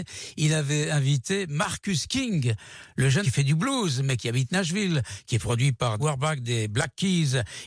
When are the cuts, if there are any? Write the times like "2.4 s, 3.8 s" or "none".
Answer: 3.2 s, 6.0 s